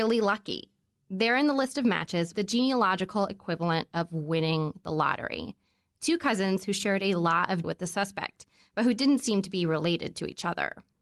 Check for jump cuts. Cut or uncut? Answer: cut